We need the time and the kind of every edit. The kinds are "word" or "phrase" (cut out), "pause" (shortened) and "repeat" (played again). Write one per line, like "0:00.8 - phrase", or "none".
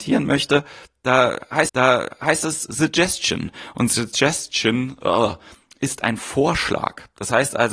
0:01.7 - repeat